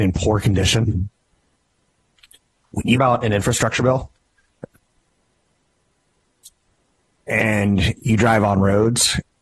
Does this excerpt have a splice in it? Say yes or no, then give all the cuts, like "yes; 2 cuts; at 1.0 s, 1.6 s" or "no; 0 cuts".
yes; 1 cut; at 2.9 s